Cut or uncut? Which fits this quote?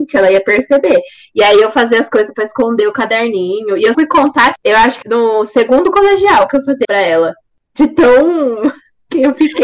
cut